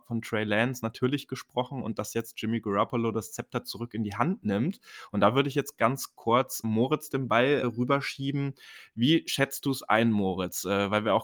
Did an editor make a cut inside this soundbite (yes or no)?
yes